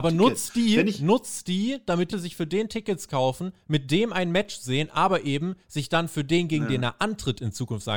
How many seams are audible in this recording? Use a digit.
1